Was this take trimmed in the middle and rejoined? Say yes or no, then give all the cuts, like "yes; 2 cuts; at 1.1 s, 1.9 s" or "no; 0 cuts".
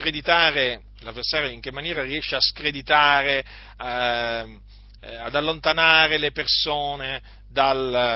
no; 0 cuts